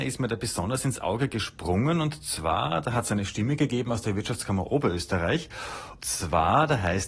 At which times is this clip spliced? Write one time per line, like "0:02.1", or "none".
0:06.0